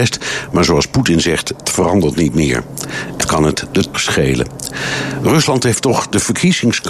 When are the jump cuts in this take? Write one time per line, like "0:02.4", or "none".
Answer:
0:01.6
0:03.2
0:03.9